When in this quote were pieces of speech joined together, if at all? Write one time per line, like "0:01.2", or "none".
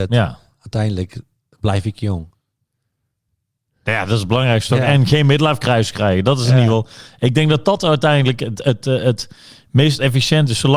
none